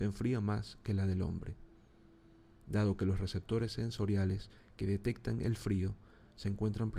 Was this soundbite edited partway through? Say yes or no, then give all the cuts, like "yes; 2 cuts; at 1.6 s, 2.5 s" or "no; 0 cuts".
no; 0 cuts